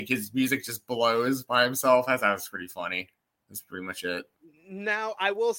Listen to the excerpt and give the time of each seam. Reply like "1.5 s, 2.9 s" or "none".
none